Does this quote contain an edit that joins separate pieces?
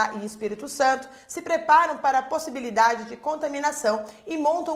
no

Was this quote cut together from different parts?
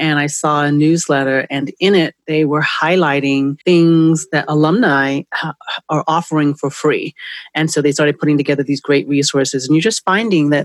yes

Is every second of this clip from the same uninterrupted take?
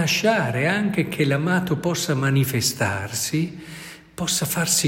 yes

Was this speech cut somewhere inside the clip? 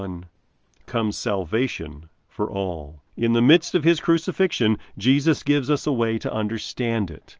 yes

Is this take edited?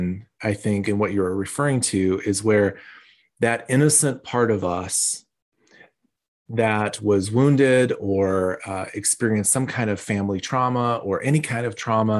no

